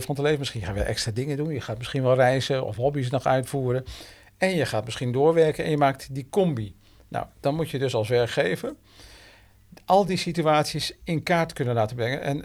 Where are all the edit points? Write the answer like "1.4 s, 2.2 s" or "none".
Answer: none

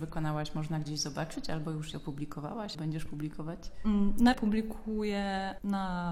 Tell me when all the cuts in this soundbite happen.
1.9 s, 2.7 s, 4.3 s

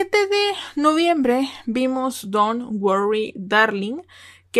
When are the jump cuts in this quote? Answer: none

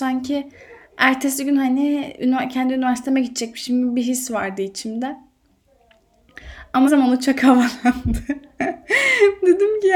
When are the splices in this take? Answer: 6.9 s

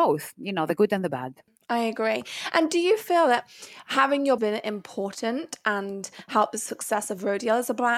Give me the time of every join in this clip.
4.4 s

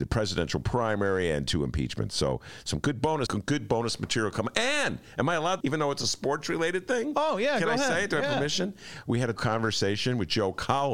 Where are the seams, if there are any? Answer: 3.3 s, 5.6 s, 9.4 s

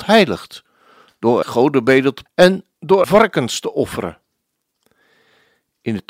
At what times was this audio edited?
1.4 s, 2.3 s, 3.0 s

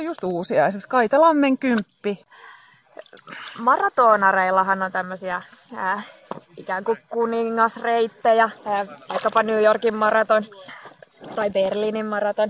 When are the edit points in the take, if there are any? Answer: 6.5 s, 8.6 s

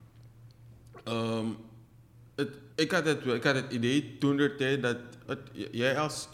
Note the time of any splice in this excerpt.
2.7 s, 5.2 s

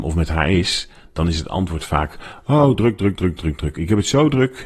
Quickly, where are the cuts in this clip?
none

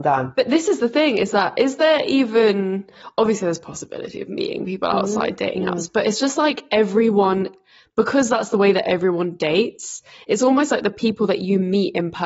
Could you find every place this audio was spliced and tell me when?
none

